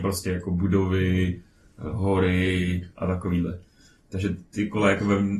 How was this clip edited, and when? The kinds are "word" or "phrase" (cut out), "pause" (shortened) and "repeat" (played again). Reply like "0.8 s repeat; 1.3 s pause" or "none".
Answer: none